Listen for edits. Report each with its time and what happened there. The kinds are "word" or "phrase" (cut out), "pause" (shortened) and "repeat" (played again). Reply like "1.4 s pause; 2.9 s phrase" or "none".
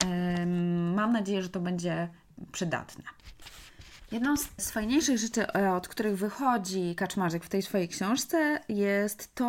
none